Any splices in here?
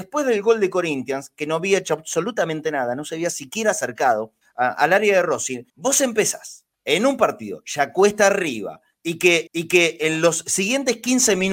yes; 4 cuts; at 4.4 s, 5.7 s, 6.7 s, 9.5 s

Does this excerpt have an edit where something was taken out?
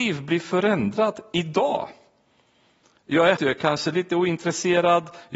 yes; 1 cut; at 3.4 s

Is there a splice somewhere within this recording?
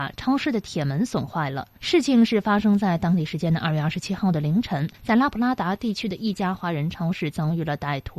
yes; 2 cuts; at 1.8 s, 4.9 s

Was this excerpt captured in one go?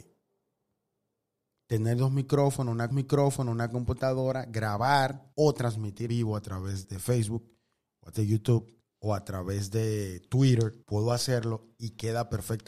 no; 7 cuts; at 2.9 s, 5.3 s, 6.1 s, 6.8 s, 8.1 s, 8.8 s, 10.8 s

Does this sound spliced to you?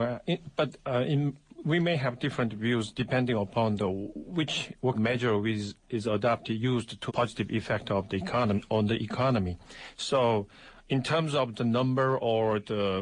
yes; 3 cuts; at 4.9 s, 7.1 s, 11.5 s

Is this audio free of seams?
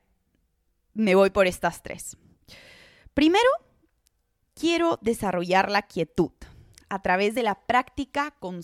yes; 0 cuts

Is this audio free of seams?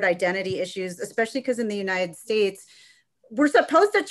yes; 0 cuts

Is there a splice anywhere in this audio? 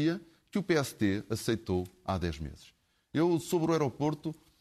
no; 0 cuts

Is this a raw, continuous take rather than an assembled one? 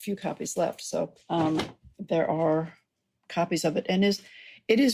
no; 1 cut; at 1.2 s

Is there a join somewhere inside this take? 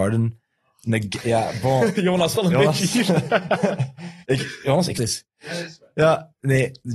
yes; 3 cuts; at 2.3 s, 4.2 s, 4.9 s

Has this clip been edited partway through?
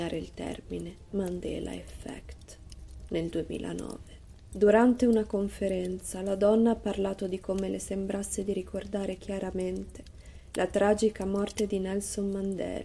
no; 0 cuts

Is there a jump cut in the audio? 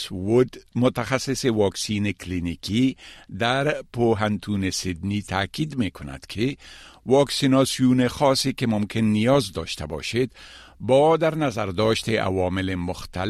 no; 0 cuts

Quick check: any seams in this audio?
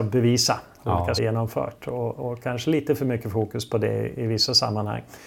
yes; 1 cut; at 1.2 s

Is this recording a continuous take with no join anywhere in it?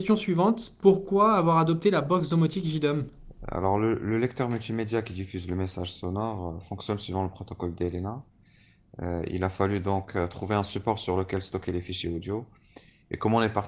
yes; 0 cuts

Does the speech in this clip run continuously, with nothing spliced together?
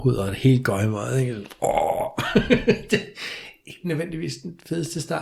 yes; 0 cuts

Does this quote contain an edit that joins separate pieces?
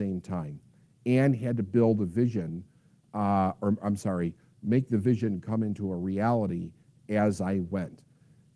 no; 0 cuts

